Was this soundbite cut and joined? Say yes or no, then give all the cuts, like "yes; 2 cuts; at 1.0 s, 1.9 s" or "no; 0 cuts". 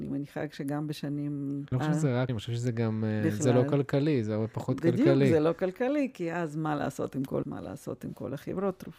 yes; 3 cuts; at 1.7 s, 2.3 s, 7.4 s